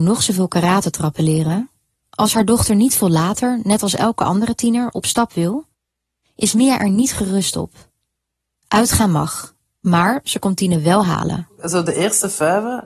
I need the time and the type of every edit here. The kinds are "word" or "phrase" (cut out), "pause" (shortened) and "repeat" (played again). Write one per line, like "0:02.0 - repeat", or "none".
none

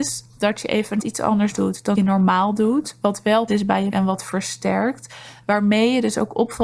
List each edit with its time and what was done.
0:01.0 - word
0:01.9 - word
0:03.5 - word
0:03.9 - word

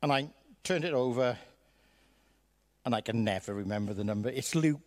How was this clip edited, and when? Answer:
none

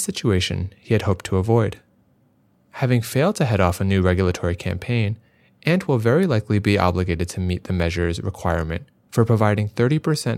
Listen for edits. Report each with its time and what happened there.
none

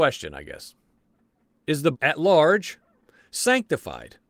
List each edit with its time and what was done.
0:01.9 - phrase

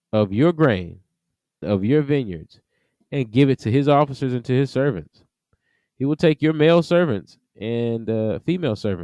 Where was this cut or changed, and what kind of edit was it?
0:01.6 - word

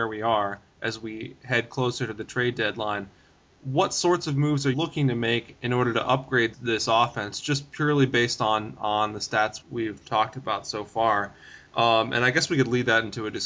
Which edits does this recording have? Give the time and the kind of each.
0:04.7 - word
0:06.5 - word
0:09.6 - word

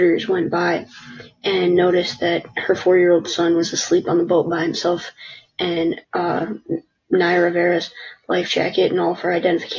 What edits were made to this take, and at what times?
0:06.0 - pause

